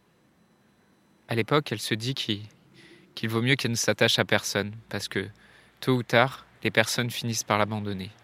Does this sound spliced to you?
no; 0 cuts

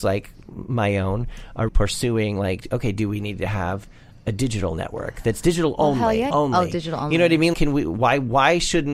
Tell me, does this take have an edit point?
yes; 3 cuts; at 1.7 s, 6.3 s, 7.5 s

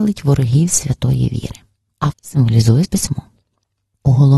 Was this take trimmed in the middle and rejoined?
yes; 2 cuts; at 2.1 s, 2.8 s

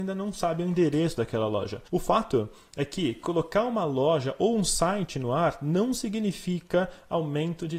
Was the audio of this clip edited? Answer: yes; 1 cut; at 1.9 s

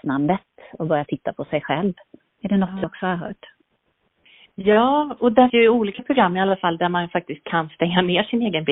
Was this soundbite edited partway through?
yes; 2 cuts; at 5.2 s, 5.5 s

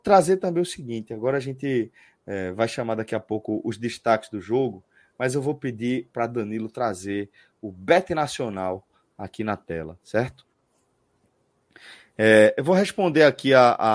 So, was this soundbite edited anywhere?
no; 0 cuts

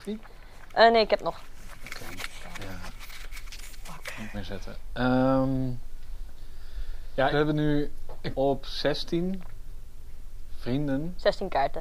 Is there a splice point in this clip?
yes; 3 cuts; at 4.3 s, 7.3 s, 8.3 s

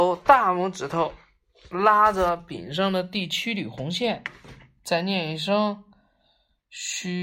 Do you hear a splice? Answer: no; 0 cuts

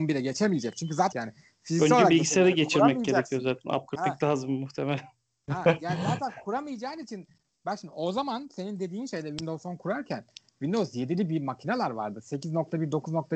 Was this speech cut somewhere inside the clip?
yes; 2 cuts; at 1.1 s, 4.0 s

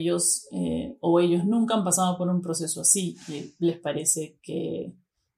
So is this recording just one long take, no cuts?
yes; 0 cuts

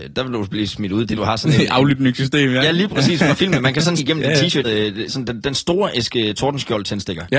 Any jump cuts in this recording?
yes; 4 cuts; at 1.1 s, 4.0 s, 4.6 s, 5.1 s

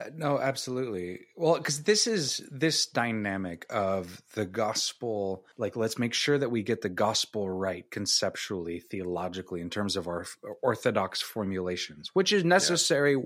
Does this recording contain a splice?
yes; 1 cut; at 5.5 s

